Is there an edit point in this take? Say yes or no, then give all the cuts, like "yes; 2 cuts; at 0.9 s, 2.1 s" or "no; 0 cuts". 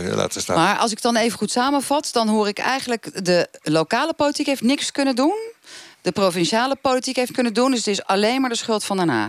yes; 2 cuts; at 5.9 s, 7.3 s